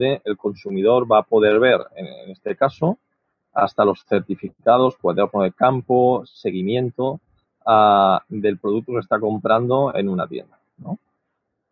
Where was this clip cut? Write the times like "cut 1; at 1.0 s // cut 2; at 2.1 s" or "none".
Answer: none